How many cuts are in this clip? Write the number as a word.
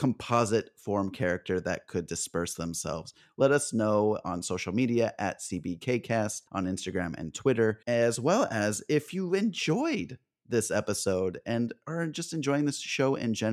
two